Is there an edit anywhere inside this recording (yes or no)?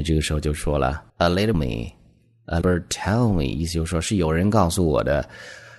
yes